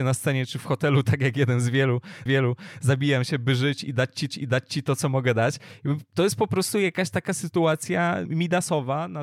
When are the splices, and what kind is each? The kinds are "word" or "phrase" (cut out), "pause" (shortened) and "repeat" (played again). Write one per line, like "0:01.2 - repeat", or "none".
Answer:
0:02.3 - repeat
0:04.3 - repeat
0:08.3 - word

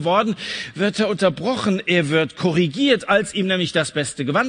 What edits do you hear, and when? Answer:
none

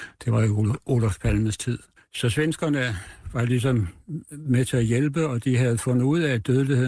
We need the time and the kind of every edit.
0:02.0 - pause

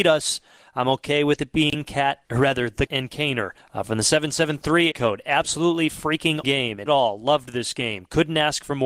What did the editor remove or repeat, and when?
0:02.2 - pause
0:02.9 - word
0:03.6 - pause
0:04.9 - word
0:06.4 - word
0:06.9 - phrase

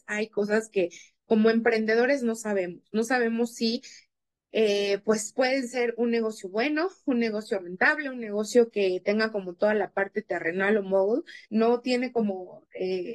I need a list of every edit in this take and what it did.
0:11.4 - pause

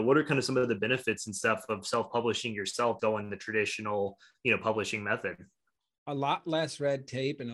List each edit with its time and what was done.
0:03.0 - word

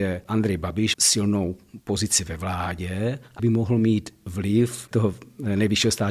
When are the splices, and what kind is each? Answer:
0:00.9 - word
0:03.4 - word
0:04.9 - word

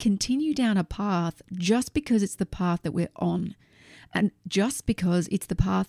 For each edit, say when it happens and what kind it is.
none

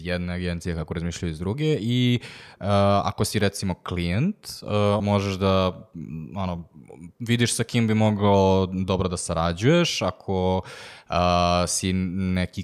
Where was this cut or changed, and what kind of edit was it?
0:05.0 - word

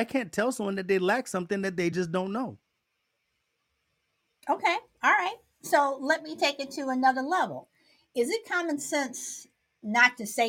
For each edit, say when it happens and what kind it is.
none

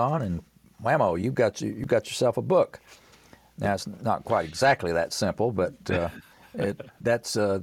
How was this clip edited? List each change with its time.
none

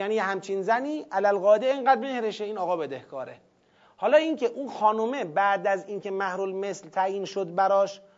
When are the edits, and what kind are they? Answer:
none

